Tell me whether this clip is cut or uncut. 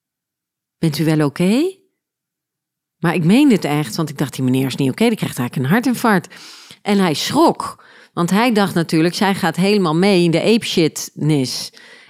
uncut